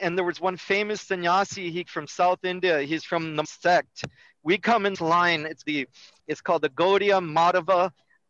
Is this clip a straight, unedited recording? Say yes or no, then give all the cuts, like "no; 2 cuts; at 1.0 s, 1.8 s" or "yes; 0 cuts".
no; 5 cuts; at 1.9 s, 3.4 s, 4.9 s, 5.6 s, 6.2 s